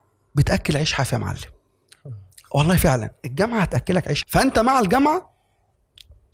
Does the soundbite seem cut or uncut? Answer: cut